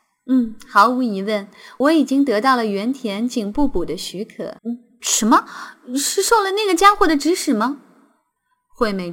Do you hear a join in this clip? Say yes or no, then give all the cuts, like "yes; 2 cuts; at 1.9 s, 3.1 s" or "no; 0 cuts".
yes; 1 cut; at 4.6 s